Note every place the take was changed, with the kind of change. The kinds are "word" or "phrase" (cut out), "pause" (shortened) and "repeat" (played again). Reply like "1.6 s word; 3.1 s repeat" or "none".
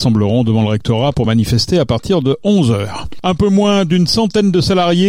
none